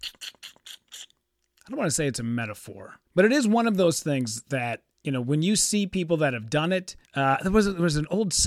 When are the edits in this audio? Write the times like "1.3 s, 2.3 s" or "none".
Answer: 3.0 s, 4.9 s, 7.0 s